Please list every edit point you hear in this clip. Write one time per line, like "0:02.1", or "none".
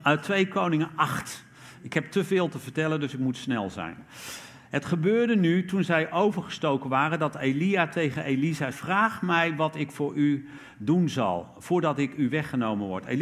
0:08.7